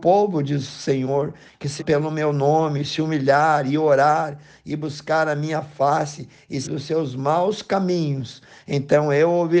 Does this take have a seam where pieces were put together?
yes; 2 cuts; at 1.8 s, 6.6 s

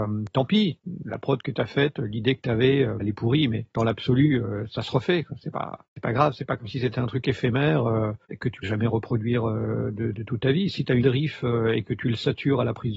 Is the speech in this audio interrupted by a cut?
yes; 7 cuts; at 3.0 s, 3.7 s, 5.9 s, 8.2 s, 8.6 s, 10.1 s, 11.0 s

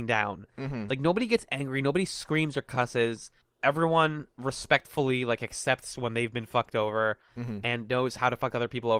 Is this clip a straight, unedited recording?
yes; 0 cuts

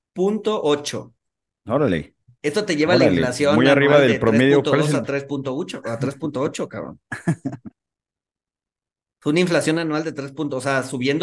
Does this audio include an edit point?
no; 0 cuts

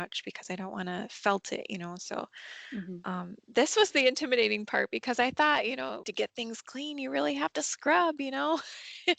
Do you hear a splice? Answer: yes; 1 cut; at 6.0 s

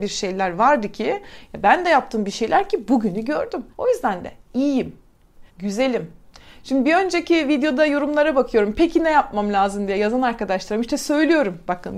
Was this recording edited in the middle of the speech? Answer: yes; 2 cuts; at 3.7 s, 5.5 s

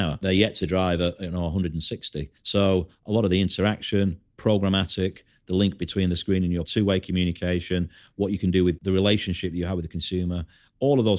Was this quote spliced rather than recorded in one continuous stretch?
yes; 3 cuts; at 2.4 s, 6.6 s, 8.8 s

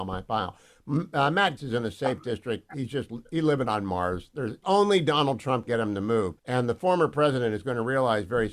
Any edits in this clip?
yes; 4 cuts; at 1.6 s, 4.6 s, 5.7 s, 6.4 s

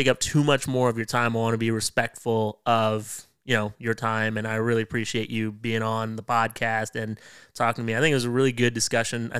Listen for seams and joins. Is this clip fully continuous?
yes; 0 cuts

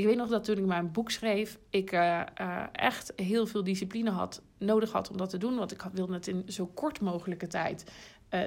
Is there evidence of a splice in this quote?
no; 0 cuts

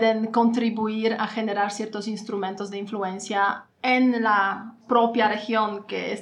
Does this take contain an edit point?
no; 0 cuts

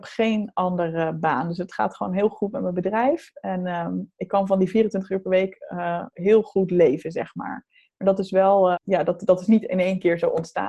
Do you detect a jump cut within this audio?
yes; 1 cut; at 8.7 s

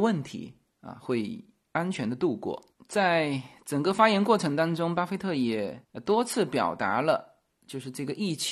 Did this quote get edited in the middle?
no; 0 cuts

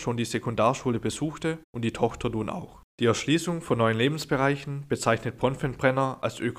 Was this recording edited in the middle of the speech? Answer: yes; 2 cuts; at 1.6 s, 2.9 s

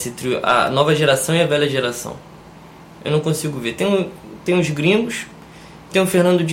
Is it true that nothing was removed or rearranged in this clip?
yes; 0 cuts

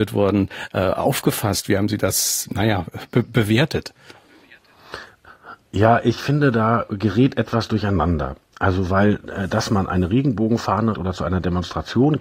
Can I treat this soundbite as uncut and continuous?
no; 1 cut; at 10.9 s

